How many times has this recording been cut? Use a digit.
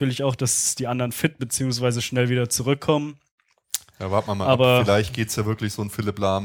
1